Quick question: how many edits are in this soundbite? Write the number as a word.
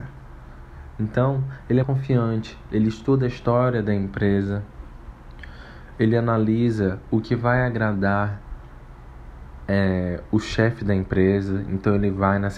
one